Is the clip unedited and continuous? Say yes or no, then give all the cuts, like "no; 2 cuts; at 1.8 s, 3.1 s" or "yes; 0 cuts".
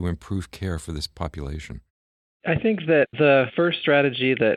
yes; 0 cuts